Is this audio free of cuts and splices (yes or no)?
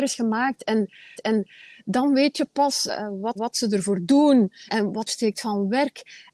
no